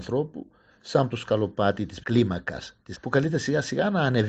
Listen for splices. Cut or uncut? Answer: cut